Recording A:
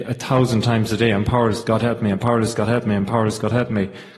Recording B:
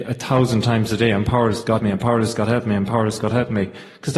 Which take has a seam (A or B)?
B